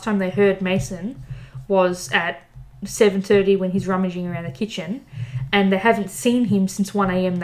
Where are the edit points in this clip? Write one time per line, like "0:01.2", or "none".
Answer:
none